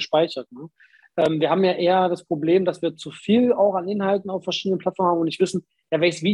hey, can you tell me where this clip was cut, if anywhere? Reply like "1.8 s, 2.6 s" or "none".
none